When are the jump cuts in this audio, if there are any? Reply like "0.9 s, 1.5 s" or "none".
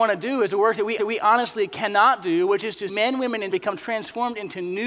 1.0 s, 2.9 s, 3.5 s

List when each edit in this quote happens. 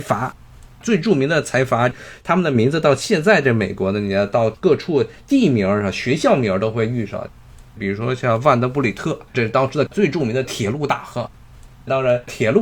9.3 s

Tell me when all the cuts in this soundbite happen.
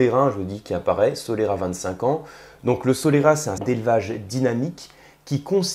3.6 s

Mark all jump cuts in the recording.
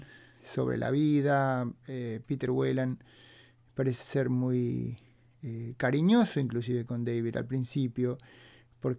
none

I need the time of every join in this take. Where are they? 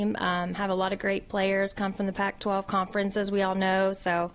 none

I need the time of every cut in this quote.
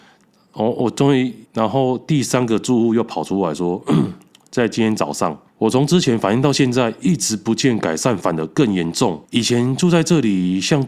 1.5 s, 5.5 s, 9.2 s

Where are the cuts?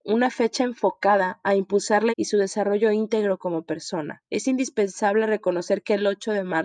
2.1 s, 4.3 s

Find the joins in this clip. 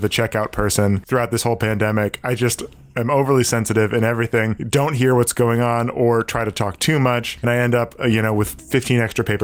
7.4 s

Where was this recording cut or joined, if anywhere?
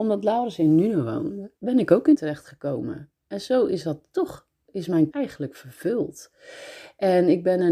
1.6 s, 2.1 s, 5.1 s

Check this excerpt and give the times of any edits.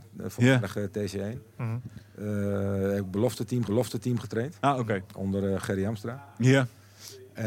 3.7 s

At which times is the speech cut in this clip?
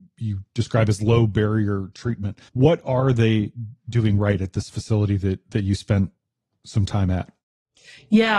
2.5 s

